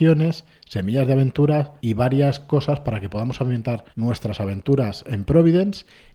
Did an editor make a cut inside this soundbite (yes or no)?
yes